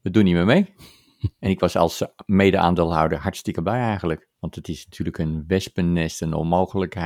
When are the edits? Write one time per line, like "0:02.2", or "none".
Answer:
0:04.3